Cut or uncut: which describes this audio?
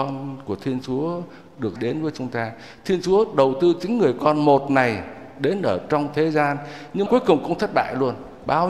cut